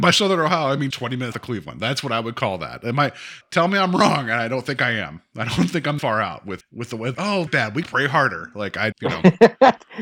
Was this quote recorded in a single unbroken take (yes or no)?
no